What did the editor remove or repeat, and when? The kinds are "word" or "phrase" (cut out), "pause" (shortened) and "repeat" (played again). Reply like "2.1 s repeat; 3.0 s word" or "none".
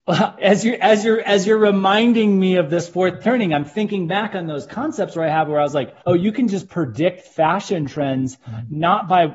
6.0 s pause